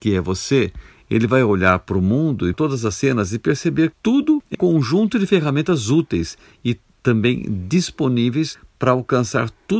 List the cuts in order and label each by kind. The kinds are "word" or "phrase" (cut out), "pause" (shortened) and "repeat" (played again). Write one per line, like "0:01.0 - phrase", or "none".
0:02.5 - word
0:03.9 - word
0:04.5 - word